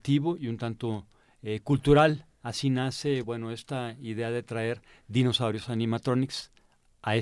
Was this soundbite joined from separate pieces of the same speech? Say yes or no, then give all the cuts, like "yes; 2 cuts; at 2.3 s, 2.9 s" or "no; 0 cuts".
no; 0 cuts